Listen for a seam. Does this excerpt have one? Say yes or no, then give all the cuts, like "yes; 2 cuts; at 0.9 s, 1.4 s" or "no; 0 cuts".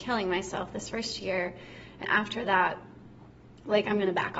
yes; 1 cut; at 2.0 s